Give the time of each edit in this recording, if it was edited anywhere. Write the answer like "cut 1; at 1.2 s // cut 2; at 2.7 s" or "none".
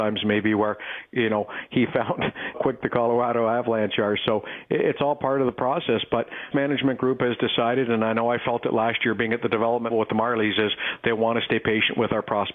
cut 1; at 2.5 s // cut 2; at 6.5 s // cut 3; at 9.9 s